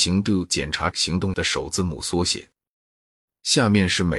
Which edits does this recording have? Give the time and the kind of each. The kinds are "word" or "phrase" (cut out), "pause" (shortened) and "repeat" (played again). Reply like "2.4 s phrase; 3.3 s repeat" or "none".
0.9 s word; 1.3 s word